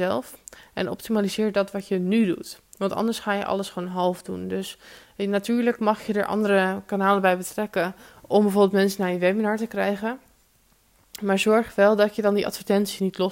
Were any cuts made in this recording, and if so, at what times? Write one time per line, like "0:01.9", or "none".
none